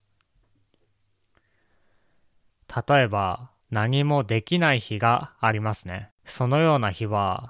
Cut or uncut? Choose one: cut